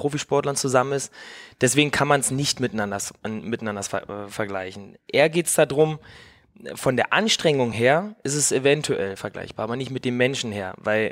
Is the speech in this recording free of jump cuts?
yes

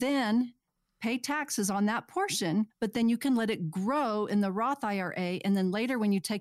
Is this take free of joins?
no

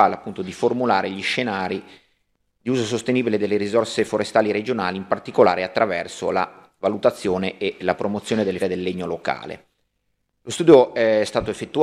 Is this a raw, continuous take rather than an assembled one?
no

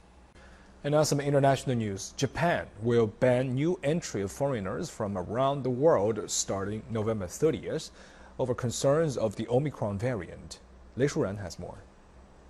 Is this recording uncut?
yes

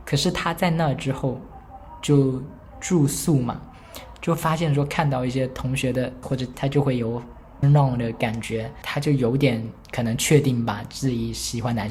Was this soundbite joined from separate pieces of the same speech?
yes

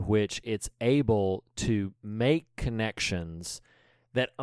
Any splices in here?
no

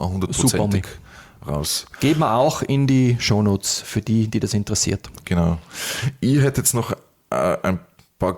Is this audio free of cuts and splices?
yes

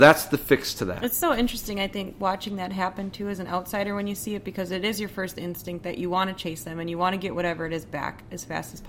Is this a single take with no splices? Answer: yes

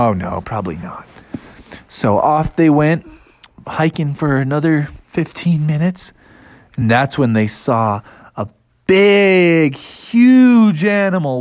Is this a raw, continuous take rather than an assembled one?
yes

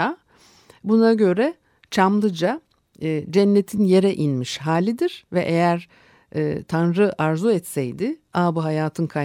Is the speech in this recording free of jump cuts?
yes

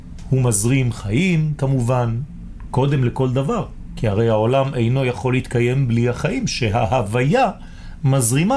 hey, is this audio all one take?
yes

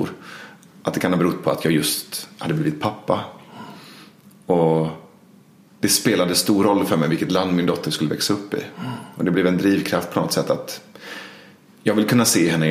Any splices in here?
no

